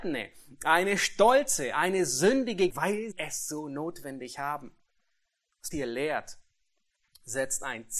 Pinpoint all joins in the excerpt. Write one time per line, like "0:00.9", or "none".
0:02.7
0:03.1
0:05.7